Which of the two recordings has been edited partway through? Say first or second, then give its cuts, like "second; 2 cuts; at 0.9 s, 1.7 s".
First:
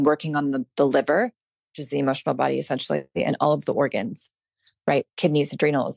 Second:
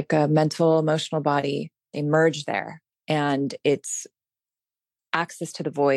second; 1 cut; at 2.9 s